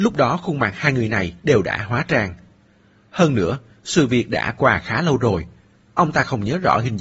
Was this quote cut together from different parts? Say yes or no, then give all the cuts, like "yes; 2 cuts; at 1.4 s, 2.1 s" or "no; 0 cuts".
no; 0 cuts